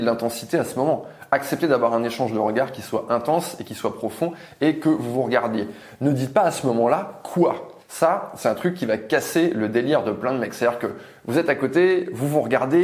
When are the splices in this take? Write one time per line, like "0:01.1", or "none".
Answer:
0:07.8